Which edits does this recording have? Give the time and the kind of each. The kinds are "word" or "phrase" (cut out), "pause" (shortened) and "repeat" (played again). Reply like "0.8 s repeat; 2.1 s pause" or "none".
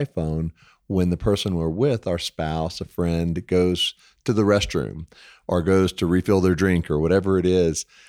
none